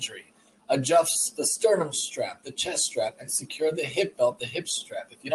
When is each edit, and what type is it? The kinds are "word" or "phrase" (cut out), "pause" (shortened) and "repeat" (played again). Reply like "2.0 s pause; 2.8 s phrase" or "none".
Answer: none